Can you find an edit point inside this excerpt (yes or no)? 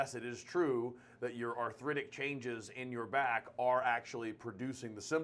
no